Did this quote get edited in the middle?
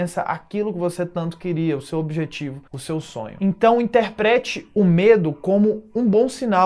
yes; 1 cut; at 2.7 s

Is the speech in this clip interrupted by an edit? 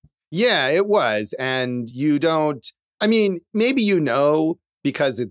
no; 0 cuts

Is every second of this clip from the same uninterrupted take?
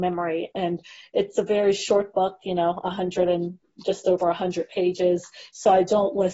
yes; 0 cuts

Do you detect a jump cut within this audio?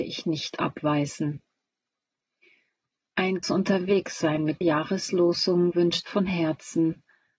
yes; 3 cuts; at 3.4 s, 4.6 s, 6.1 s

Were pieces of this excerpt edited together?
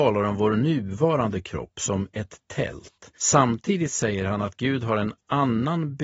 yes; 1 cut; at 3.2 s

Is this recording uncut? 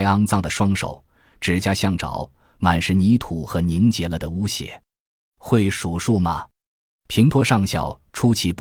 yes; 0 cuts

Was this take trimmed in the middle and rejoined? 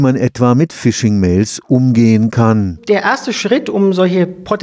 no; 0 cuts

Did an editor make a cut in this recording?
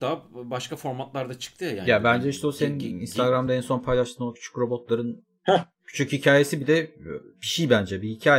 no; 0 cuts

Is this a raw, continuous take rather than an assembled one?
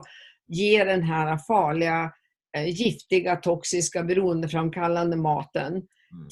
yes; 0 cuts

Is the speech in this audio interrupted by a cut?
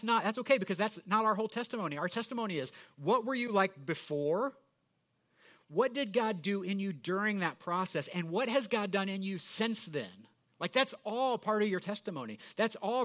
no; 0 cuts

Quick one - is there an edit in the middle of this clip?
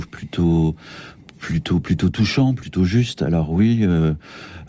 no; 0 cuts

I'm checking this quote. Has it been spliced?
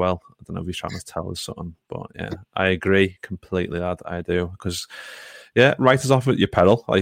no; 0 cuts

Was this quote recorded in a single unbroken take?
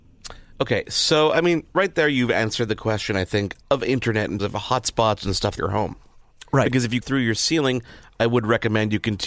no; 4 cuts; at 3.6 s, 4.4 s, 5.6 s, 7.0 s

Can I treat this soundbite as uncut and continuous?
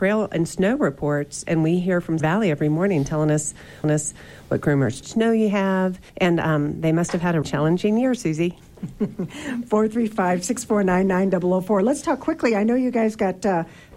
no; 5 cuts; at 2.2 s, 3.8 s, 5.0 s, 6.1 s, 7.4 s

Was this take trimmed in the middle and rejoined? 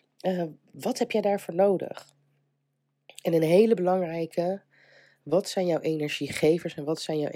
no; 0 cuts

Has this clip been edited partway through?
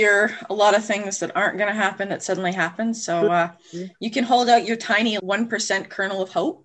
yes; 1 cut; at 5.2 s

